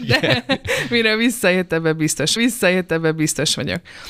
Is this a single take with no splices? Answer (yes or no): no